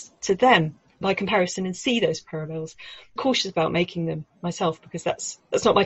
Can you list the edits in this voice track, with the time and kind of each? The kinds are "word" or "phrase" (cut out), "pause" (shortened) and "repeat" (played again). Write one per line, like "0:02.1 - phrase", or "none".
0:01.0 - word
0:03.2 - word